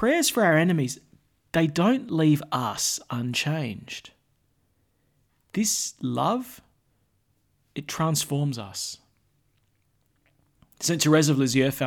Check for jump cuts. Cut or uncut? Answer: uncut